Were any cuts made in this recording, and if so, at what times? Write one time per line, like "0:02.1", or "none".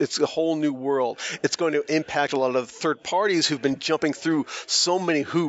none